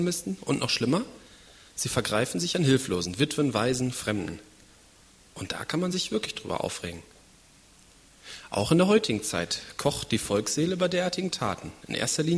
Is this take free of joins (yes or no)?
yes